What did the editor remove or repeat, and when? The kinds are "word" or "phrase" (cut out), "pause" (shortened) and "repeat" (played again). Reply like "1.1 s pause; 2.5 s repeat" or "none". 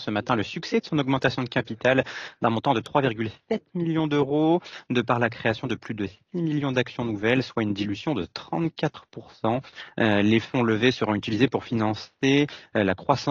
none